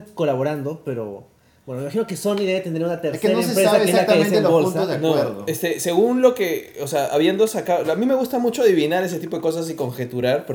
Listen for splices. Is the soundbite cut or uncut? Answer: uncut